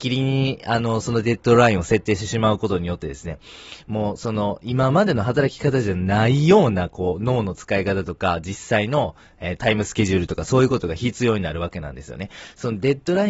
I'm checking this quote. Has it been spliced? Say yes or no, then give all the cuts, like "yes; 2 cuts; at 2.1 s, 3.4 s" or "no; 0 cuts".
yes; 1 cut; at 9.6 s